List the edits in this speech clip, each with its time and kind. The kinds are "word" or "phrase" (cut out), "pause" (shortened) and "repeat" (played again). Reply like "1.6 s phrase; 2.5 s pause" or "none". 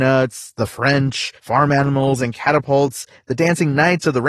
1.4 s pause